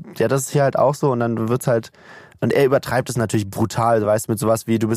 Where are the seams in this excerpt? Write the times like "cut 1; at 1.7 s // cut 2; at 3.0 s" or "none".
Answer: none